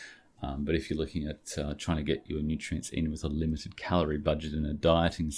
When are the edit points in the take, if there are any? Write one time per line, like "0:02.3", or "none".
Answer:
none